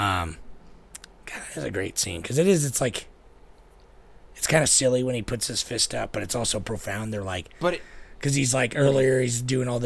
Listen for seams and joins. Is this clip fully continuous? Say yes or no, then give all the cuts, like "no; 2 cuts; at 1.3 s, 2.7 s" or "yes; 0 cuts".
yes; 0 cuts